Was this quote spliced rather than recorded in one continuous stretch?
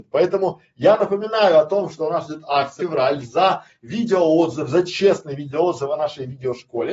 yes; 1 cut; at 2.8 s

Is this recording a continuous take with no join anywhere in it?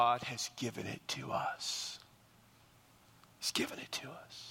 yes; 0 cuts

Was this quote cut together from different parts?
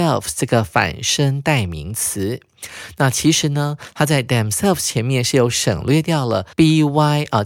yes; 1 cut; at 6.5 s

